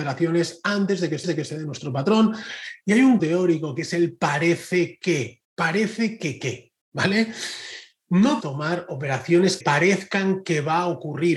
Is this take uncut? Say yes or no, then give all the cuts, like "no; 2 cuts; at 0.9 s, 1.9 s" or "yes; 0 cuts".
no; 6 cuts; at 1.2 s, 3.2 s, 5.4 s, 6.8 s, 8.4 s, 9.6 s